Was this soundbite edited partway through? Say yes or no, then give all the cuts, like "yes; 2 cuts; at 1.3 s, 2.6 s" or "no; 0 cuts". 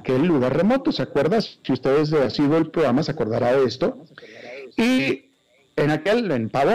no; 0 cuts